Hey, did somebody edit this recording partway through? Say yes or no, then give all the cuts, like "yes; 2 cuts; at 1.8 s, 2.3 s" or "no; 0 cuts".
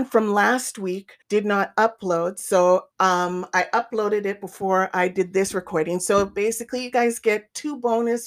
yes; 2 cuts; at 1.2 s, 2.9 s